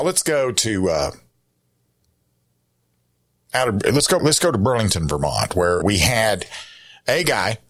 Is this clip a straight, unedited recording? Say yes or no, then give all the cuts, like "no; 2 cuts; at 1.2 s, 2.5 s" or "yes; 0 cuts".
no; 2 cuts; at 4.2 s, 5.8 s